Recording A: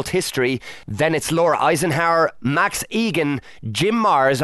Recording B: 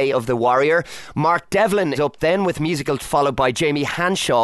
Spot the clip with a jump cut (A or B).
B